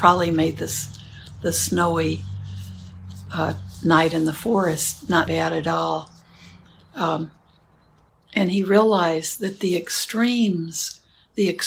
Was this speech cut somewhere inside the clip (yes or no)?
yes